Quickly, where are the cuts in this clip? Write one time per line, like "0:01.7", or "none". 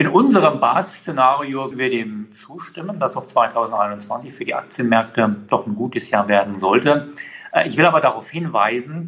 0:01.7